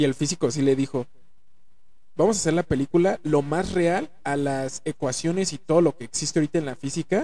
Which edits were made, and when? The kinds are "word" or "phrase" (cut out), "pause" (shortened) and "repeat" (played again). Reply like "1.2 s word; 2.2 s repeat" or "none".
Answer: none